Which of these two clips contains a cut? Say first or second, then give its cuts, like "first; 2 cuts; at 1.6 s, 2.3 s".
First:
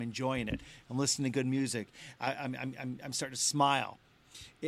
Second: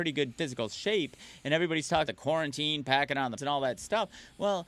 second; 2 cuts; at 2.1 s, 3.4 s